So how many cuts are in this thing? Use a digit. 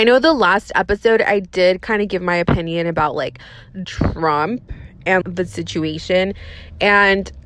2